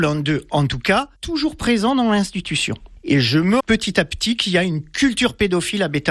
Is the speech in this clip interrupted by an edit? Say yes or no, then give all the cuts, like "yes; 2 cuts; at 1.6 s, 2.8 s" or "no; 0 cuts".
yes; 2 cuts; at 1.2 s, 3.6 s